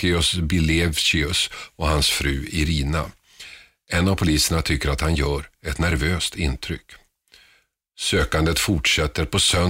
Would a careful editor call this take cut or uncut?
uncut